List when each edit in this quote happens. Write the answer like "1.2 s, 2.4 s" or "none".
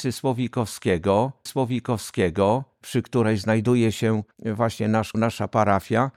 1.5 s, 4.3 s, 5.1 s